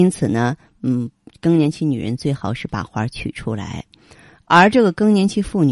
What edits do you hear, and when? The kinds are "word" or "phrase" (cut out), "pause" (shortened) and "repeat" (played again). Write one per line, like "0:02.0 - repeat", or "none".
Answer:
none